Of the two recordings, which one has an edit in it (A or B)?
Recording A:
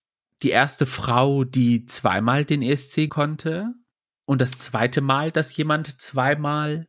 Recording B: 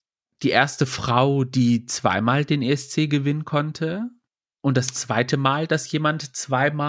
A